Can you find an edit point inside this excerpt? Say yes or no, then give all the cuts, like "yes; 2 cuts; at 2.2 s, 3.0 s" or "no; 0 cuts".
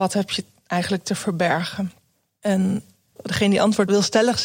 no; 0 cuts